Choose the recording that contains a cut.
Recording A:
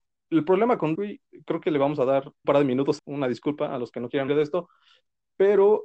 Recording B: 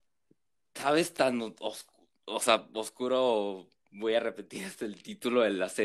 A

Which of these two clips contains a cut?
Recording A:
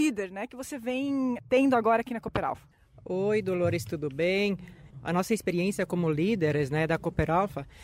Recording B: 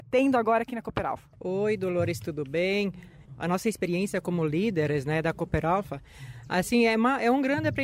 B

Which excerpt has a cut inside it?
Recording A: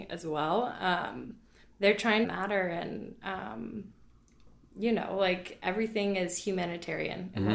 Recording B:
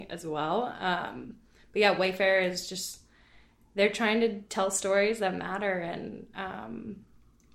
A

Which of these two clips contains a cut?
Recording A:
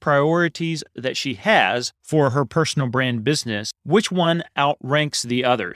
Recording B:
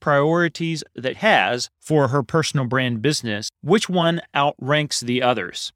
B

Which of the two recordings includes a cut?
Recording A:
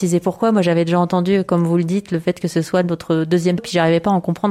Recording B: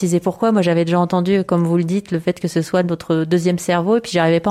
A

